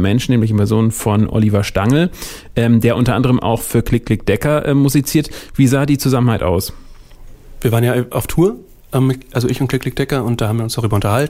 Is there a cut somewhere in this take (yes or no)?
no